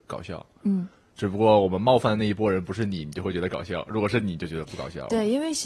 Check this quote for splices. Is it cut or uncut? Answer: uncut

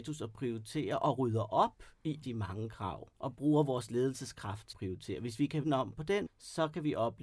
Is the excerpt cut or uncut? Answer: cut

